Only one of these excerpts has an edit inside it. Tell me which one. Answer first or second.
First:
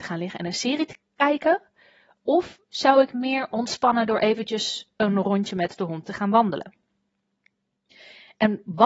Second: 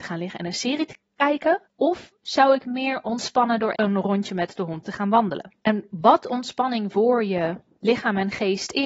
second